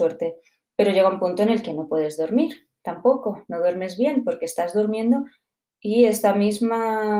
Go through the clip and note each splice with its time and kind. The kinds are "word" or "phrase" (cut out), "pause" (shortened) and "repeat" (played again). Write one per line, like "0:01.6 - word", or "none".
none